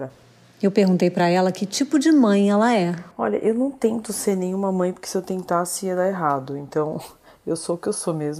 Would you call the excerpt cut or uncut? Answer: uncut